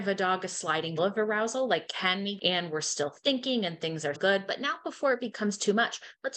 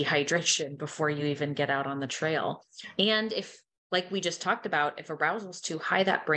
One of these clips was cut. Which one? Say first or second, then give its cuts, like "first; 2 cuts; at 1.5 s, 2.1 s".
first; 3 cuts; at 1.0 s, 2.4 s, 4.1 s